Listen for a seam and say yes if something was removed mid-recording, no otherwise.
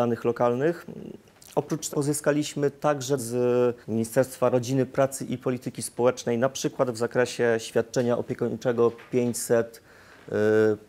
yes